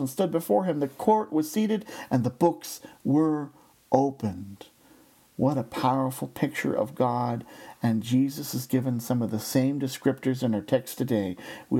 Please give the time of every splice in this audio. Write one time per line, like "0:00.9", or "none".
none

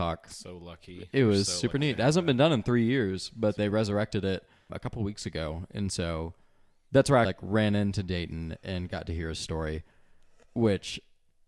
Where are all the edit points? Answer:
0:03.6
0:04.7
0:07.2

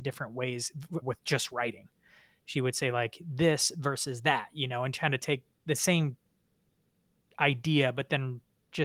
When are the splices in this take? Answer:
0:01.0

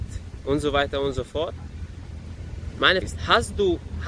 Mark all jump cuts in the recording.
0:03.0

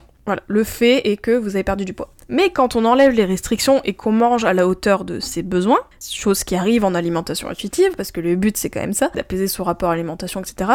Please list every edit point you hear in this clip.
0:05.9

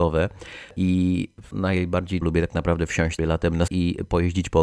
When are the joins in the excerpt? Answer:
0:01.5
0:02.2
0:03.2
0:03.7

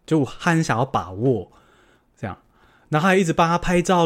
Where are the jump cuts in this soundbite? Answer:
none

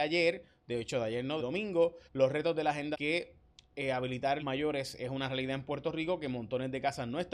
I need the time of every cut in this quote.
0:01.4
0:02.1
0:02.9
0:04.4

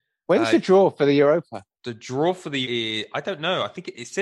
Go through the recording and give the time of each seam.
0:01.7
0:02.6

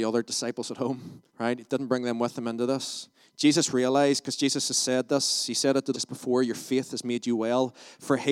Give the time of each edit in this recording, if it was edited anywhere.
0:01.3
0:05.9

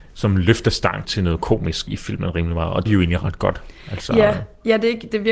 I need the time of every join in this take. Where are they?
0:01.0
0:01.9
0:02.8

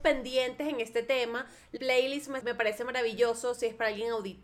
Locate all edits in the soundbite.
0:01.8
0:02.4

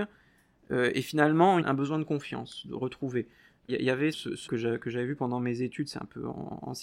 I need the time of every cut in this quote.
0:01.6
0:03.7
0:04.1
0:04.5

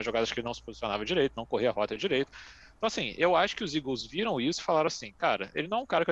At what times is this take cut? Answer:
none

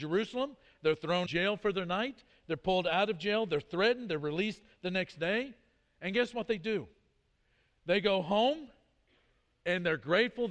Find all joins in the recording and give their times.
0:01.3

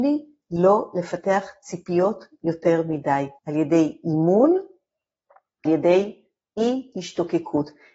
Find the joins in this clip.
0:03.4
0:05.7

